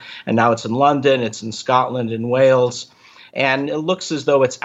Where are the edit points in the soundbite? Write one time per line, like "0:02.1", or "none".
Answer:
none